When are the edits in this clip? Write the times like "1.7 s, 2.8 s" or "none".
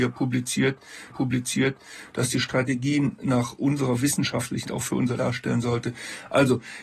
1.1 s, 4.6 s, 5.1 s